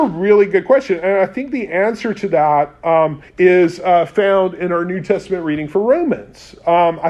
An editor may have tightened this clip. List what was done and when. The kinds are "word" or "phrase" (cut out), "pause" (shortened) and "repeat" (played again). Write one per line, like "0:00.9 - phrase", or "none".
0:03.3 - pause